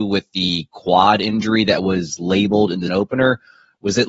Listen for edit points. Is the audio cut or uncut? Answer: cut